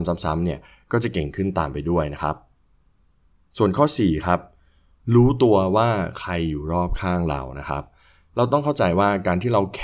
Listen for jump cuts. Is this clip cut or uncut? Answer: uncut